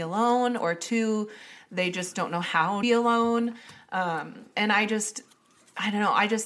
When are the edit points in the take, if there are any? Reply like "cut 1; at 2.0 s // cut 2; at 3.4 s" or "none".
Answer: cut 1; at 2.8 s